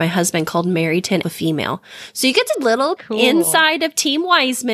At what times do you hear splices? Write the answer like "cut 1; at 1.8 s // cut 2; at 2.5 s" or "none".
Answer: cut 1; at 1.2 s // cut 2; at 2.5 s // cut 3; at 3.0 s